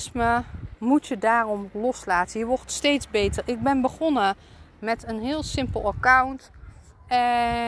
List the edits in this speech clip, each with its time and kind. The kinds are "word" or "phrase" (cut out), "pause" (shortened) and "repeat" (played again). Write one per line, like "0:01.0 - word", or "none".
none